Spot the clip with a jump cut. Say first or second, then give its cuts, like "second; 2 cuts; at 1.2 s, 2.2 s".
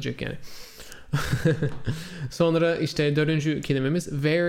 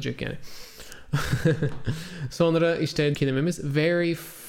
second; 1 cut; at 3.1 s